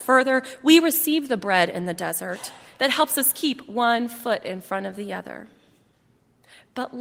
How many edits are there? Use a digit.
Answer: 0